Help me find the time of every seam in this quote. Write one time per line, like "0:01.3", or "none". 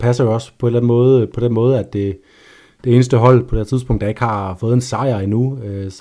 none